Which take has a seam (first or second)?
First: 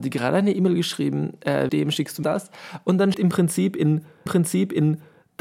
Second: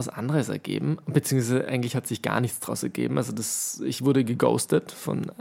first